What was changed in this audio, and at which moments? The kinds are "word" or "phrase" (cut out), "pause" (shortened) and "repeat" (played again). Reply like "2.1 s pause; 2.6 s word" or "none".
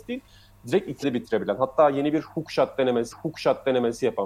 1.0 s word; 3.1 s repeat

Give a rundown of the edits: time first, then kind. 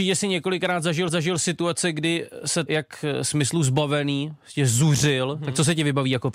1.1 s repeat; 2.7 s phrase

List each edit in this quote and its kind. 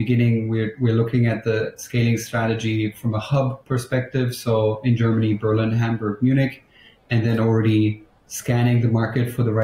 none

